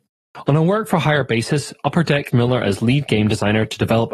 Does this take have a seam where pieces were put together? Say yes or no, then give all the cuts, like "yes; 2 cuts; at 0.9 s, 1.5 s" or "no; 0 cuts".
yes; 1 cut; at 2.3 s